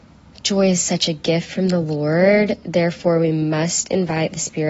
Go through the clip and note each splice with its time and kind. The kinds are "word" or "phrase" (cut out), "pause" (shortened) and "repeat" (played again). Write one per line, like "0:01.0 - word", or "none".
none